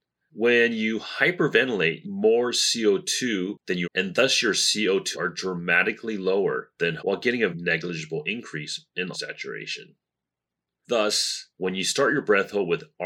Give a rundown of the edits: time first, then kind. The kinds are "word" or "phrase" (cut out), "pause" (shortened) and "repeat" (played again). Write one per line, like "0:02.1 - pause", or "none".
0:02.0 - phrase
0:03.8 - phrase
0:05.1 - word
0:07.0 - word
0:07.5 - word
0:09.1 - word